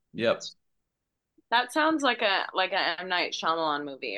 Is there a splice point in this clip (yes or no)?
no